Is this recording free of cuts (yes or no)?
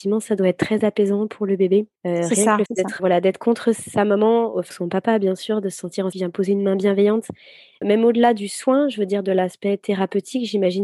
no